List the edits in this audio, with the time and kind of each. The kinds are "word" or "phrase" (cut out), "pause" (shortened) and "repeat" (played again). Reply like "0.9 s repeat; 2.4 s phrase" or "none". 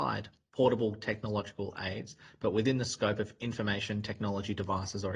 none

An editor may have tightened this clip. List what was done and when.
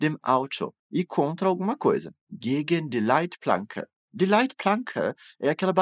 none

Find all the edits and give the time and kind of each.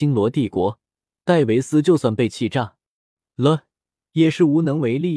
none

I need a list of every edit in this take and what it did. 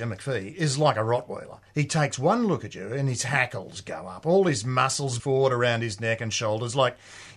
1.7 s pause; 5.2 s word

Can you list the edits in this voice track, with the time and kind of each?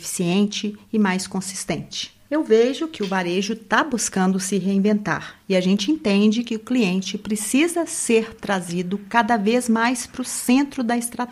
none

